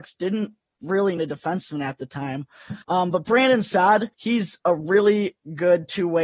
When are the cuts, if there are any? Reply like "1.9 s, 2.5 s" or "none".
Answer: 1.2 s, 2.8 s, 4.1 s